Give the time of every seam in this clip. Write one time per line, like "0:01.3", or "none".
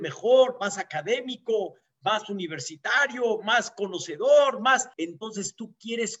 0:04.9